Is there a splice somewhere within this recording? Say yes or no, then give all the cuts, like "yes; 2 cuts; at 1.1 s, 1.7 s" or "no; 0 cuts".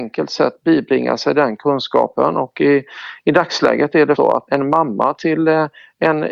yes; 2 cuts; at 4.2 s, 4.5 s